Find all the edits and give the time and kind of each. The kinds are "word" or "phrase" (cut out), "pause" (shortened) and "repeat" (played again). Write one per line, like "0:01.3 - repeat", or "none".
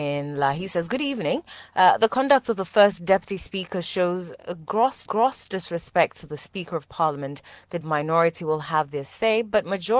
0:05.1 - repeat
0:07.8 - phrase